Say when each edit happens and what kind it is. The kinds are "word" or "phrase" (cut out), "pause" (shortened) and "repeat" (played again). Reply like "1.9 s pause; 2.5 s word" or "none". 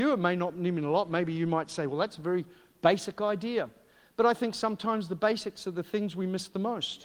none

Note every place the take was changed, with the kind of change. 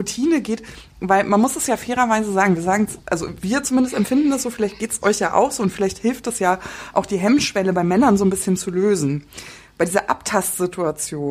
none

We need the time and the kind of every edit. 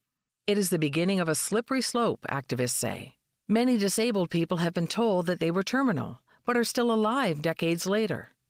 none

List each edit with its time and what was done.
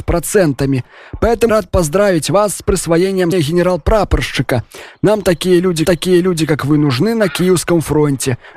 1.5 s word; 3.3 s word; 5.8 s repeat

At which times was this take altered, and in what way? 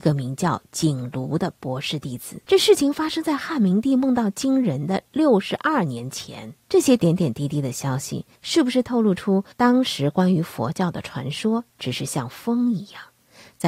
2.4 s pause; 6.6 s pause; 8.4 s pause; 9.5 s pause

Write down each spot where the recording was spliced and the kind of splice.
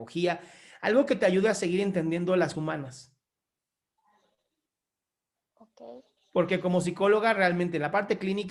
2.5 s word

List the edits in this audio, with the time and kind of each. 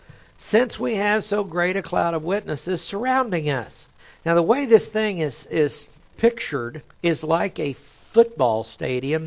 4.0 s pause; 6.9 s pause

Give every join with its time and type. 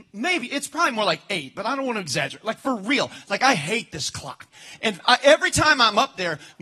none

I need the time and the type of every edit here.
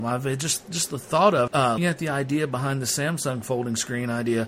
1.5 s word; 1.8 s word

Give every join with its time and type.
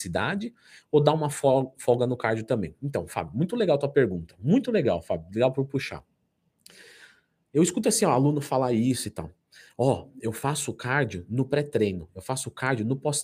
7.8 s word

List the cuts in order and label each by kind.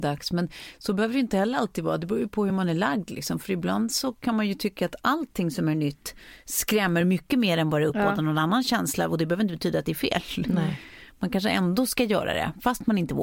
none

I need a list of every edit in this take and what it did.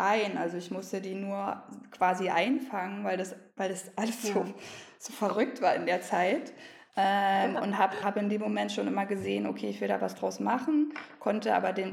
8.0 s word

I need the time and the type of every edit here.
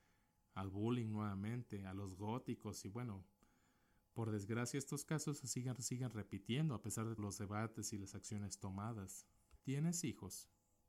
5.8 s repeat; 7.2 s word; 9.6 s pause

